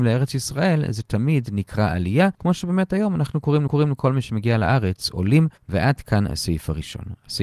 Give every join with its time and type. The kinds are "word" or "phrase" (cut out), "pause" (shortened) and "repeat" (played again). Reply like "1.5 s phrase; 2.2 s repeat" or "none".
2.3 s pause; 3.7 s repeat; 5.6 s pause